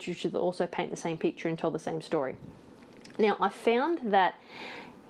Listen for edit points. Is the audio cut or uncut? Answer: uncut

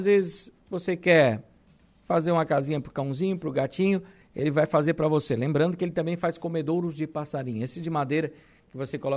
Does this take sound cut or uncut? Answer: uncut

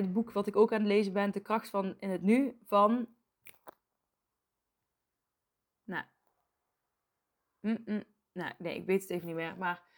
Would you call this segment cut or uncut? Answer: uncut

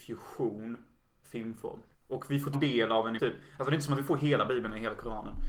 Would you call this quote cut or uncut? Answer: cut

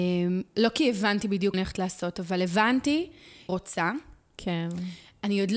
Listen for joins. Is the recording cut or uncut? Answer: cut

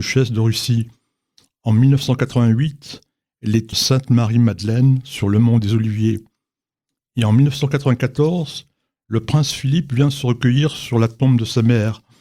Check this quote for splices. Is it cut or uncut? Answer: cut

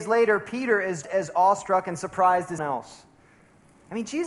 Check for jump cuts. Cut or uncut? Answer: cut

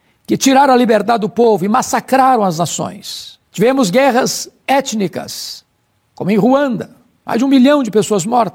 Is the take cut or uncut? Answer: cut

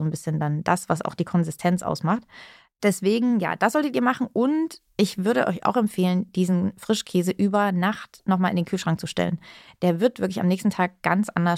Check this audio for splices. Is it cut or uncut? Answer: uncut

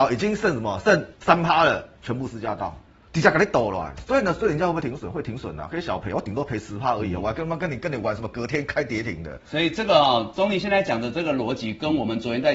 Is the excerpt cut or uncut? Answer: cut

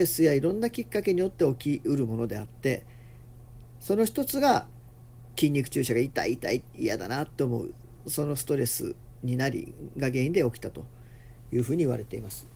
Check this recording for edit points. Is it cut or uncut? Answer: uncut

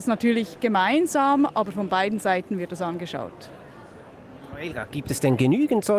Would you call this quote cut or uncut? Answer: uncut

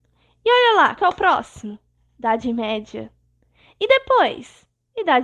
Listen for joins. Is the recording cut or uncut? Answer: cut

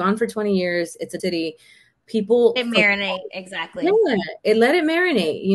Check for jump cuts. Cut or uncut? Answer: cut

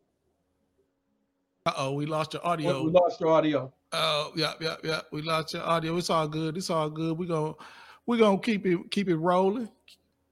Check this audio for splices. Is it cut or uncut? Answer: uncut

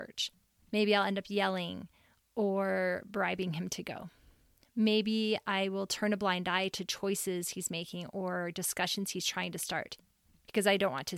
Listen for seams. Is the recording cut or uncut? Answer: uncut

